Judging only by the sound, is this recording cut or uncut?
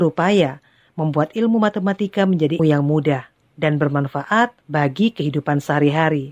cut